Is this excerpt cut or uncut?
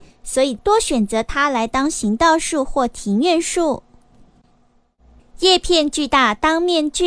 uncut